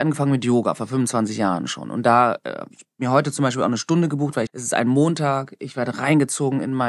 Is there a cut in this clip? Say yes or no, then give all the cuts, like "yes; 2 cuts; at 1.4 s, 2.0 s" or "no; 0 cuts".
yes; 1 cut; at 4.5 s